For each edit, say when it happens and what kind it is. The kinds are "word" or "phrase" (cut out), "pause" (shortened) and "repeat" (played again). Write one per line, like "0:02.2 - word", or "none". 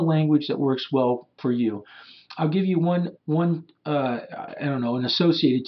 0:01.4 - word
0:03.2 - word